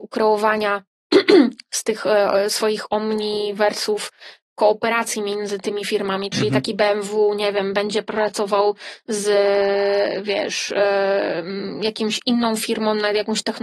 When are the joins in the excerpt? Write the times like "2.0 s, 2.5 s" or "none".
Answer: none